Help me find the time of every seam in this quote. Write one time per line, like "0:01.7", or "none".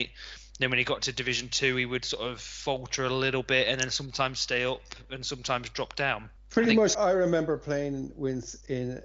0:06.4
0:06.9